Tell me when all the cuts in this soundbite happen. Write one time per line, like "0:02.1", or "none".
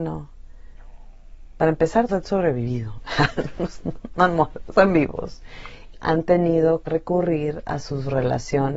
0:02.1
0:04.7
0:05.9
0:06.9